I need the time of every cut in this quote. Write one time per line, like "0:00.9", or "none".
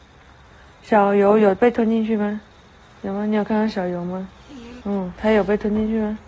0:02.8
0:04.8